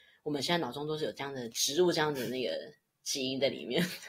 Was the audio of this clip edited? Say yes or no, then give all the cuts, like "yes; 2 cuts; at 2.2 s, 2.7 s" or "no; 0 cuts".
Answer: no; 0 cuts